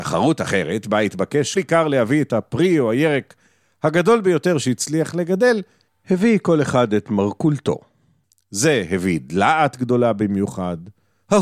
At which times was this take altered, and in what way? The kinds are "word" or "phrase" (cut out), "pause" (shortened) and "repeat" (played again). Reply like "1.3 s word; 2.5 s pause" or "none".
1.6 s word